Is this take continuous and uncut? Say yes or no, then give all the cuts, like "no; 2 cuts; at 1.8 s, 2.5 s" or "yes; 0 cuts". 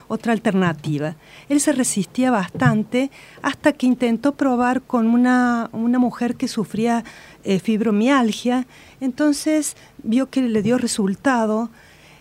yes; 0 cuts